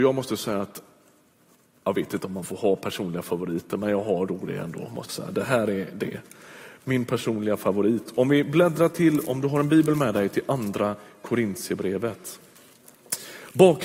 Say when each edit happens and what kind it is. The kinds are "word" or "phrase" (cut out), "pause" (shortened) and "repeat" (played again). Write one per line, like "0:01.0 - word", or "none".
0:05.1 - word